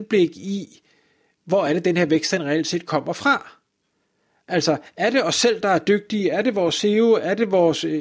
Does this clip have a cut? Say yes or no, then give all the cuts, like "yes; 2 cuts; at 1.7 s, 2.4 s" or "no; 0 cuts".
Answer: no; 0 cuts